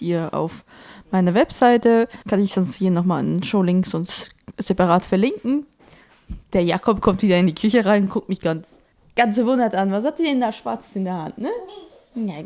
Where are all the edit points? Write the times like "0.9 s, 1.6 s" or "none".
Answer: 2.2 s, 8.9 s